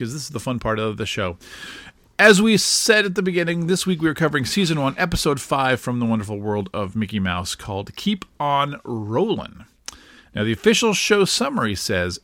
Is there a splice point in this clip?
no; 0 cuts

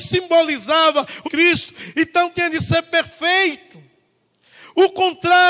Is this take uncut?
no; 1 cut; at 1.2 s

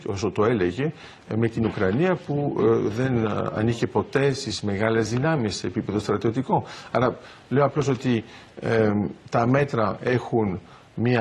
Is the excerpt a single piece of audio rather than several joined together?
yes; 0 cuts

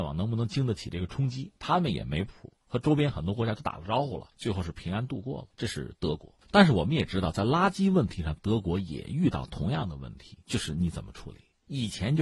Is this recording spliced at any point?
yes; 4 cuts; at 4.3 s, 5.5 s, 6.4 s, 10.4 s

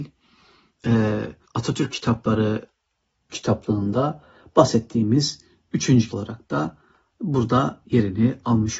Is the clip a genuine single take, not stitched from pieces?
no; 3 cuts; at 1.4 s, 3.3 s, 6.1 s

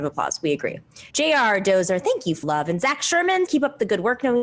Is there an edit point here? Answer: yes; 3 cuts; at 1.1 s, 2.4 s, 3.5 s

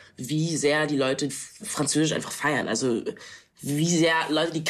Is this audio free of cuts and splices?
no; 2 cuts; at 1.3 s, 1.6 s

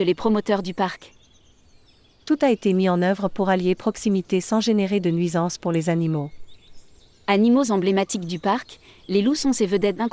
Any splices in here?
no; 0 cuts

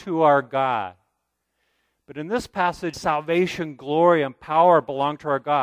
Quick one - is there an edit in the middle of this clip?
yes; 1 cut; at 2.9 s

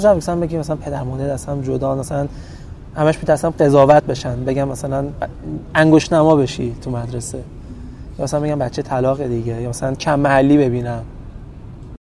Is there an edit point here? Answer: no; 0 cuts

